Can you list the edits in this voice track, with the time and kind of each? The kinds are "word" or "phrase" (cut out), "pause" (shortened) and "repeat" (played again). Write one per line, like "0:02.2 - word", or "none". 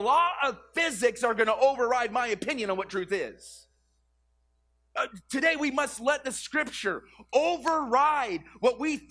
none